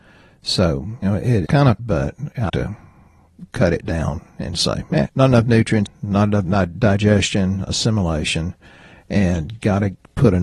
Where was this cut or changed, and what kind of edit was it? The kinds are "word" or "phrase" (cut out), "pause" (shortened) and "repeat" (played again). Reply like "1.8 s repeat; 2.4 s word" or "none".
1.0 s word; 1.5 s word; 1.8 s word; 2.5 s word; 5.1 s word; 5.9 s word

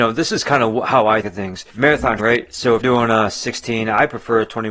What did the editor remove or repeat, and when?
1.2 s word; 2.2 s word; 2.8 s word

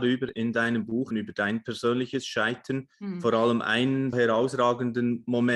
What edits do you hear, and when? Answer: 1.1 s word; 2.9 s pause; 4.1 s word

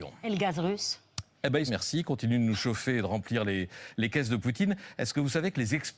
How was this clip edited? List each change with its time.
1.7 s phrase

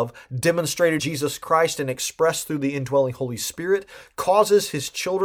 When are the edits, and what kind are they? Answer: 1.0 s word

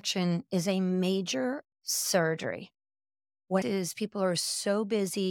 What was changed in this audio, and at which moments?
1.7 s word; 3.6 s word

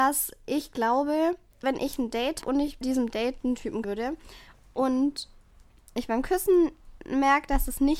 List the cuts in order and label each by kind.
1.6 s word; 2.4 s word; 2.8 s word; 3.8 s word

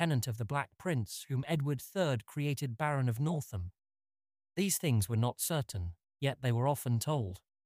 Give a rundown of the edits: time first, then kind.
none

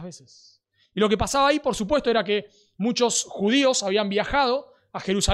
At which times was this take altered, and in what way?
none

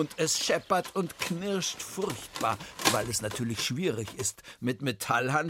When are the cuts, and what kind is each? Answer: none

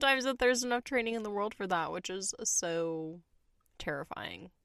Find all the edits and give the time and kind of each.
none

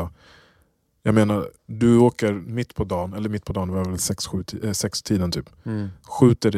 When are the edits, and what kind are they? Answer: 1.6 s pause

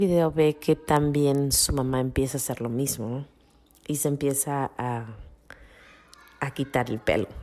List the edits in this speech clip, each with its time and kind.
none

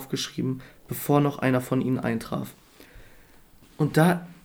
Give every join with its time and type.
none

